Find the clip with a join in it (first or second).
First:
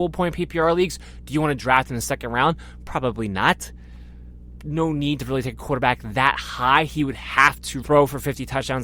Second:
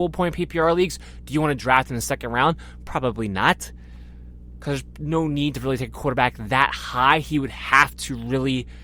first